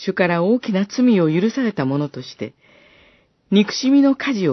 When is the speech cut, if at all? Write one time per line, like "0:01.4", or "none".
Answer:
none